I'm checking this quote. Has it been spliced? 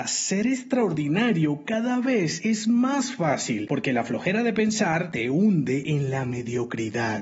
no; 0 cuts

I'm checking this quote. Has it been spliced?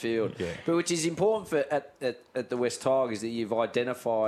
no; 0 cuts

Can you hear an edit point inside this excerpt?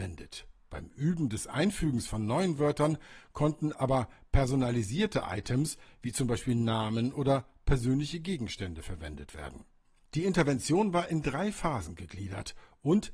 no; 0 cuts

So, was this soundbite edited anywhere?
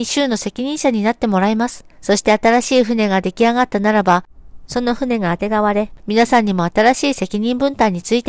yes; 1 cut; at 1.9 s

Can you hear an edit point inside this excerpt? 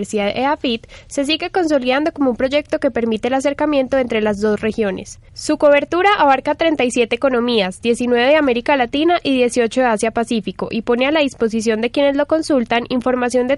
no; 0 cuts

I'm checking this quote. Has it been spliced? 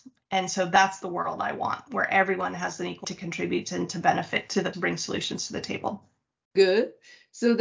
yes; 2 cuts; at 3.0 s, 4.7 s

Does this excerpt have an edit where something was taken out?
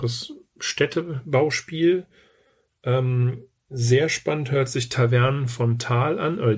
no; 0 cuts

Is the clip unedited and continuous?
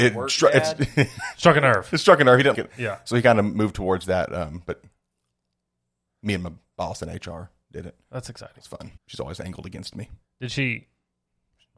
no; 2 cuts; at 2.5 s, 9.0 s

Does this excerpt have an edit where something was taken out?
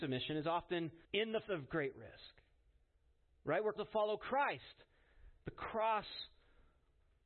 yes; 3 cuts; at 1.0 s, 1.5 s, 3.8 s

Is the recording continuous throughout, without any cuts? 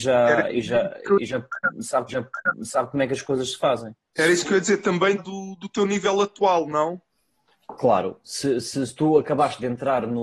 no; 3 cuts; at 2.1 s, 4.0 s, 5.2 s

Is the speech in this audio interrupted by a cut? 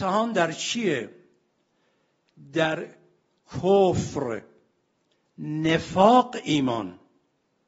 no; 0 cuts

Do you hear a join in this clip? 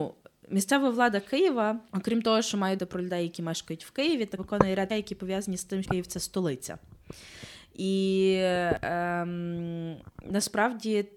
yes; 5 cuts; at 1.9 s, 2.8 s, 4.4 s, 4.9 s, 5.8 s

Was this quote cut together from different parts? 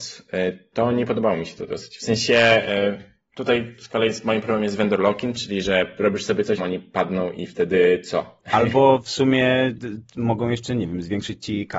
yes; 1 cut; at 6.6 s

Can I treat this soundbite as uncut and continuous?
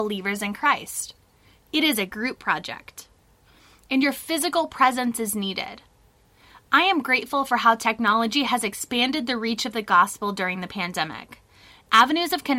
yes; 0 cuts

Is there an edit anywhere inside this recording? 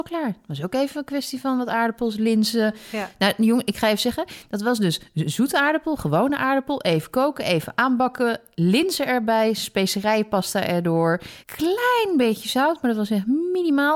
yes; 1 cut; at 11.4 s

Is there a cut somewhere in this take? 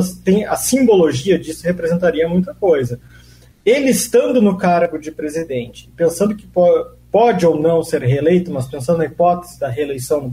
no; 0 cuts

